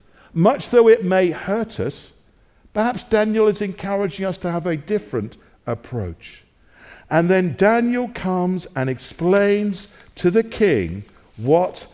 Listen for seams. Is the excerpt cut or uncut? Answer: uncut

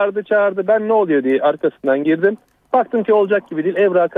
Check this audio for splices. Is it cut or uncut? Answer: uncut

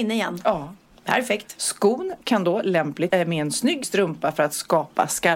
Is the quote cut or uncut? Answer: cut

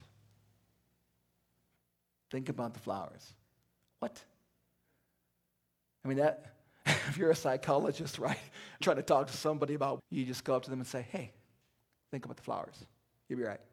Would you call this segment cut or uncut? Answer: cut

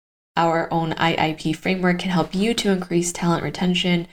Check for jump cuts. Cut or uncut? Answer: uncut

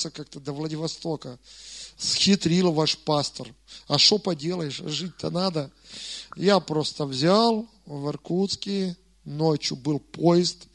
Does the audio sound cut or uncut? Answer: uncut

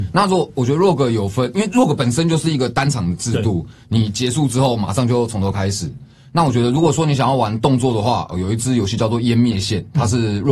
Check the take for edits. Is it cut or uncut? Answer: uncut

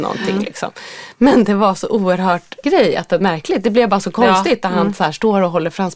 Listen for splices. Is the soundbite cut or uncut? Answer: cut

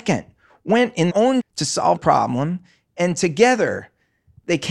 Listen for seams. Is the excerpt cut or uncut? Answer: cut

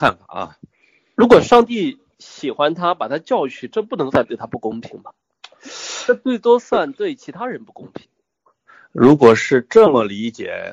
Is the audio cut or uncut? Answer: uncut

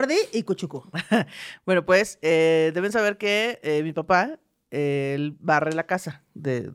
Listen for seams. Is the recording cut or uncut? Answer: uncut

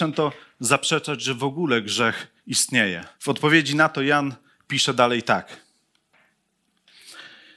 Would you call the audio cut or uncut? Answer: cut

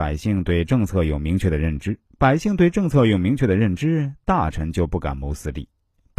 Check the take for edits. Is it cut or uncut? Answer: cut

